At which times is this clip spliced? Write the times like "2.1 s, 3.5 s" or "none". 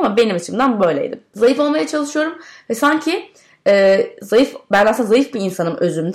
none

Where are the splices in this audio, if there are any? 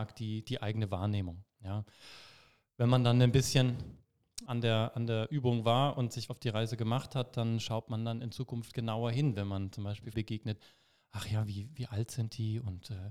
4.5 s, 6.3 s, 10.1 s

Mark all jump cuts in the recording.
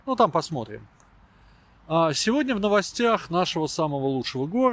none

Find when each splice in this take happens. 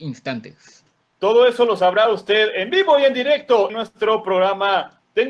3.7 s

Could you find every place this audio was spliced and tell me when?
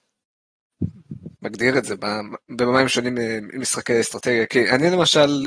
1.4 s

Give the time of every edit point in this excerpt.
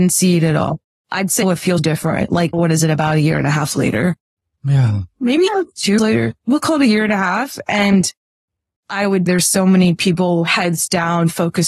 1.0 s, 1.4 s, 1.8 s, 2.5 s, 5.5 s, 6.0 s, 9.3 s

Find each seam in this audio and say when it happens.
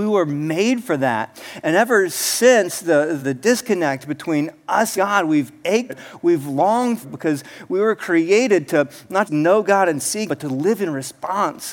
3.2 s, 4.9 s, 5.9 s, 7.0 s, 9.3 s, 10.3 s

